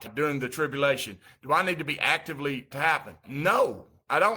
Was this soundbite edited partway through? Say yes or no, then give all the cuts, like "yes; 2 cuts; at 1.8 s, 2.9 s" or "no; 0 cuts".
yes; 1 cut; at 2.7 s